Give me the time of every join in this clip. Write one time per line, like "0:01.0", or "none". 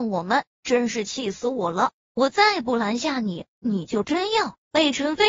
0:02.1